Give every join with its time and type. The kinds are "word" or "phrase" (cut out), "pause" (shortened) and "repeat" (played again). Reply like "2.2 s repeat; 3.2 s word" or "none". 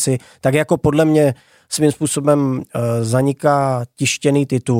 none